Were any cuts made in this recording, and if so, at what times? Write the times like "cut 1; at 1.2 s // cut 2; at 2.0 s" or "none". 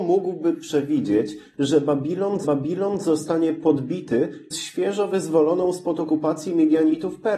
cut 1; at 2.4 s // cut 2; at 4.5 s